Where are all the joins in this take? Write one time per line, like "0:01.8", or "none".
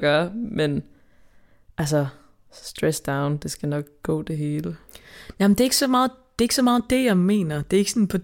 none